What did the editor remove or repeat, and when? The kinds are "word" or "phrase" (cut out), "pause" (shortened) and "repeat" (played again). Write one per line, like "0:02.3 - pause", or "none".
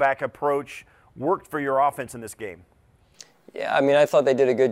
none